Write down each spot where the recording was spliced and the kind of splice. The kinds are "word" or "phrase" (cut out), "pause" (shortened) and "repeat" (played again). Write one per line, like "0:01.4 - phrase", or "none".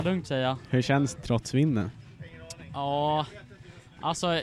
0:01.2 - word